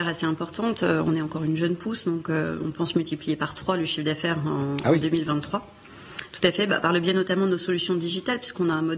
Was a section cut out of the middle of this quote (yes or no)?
no